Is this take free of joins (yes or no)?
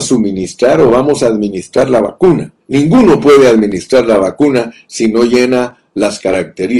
no